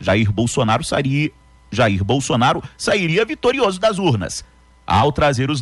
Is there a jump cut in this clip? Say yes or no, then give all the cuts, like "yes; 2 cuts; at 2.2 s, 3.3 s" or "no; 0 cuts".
no; 0 cuts